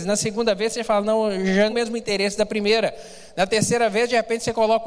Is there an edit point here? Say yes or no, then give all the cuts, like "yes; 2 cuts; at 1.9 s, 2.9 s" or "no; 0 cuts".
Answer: yes; 1 cut; at 1.7 s